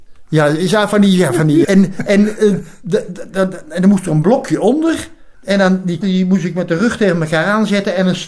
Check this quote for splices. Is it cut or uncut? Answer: cut